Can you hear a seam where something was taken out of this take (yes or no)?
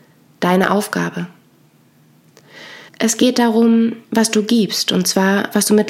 yes